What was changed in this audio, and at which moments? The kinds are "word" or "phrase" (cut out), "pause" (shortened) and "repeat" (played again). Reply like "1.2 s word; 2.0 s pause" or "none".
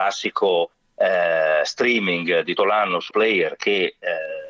2.6 s word; 3.1 s word